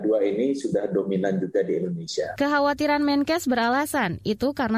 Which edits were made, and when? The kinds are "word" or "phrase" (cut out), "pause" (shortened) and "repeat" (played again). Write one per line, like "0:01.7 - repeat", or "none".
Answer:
none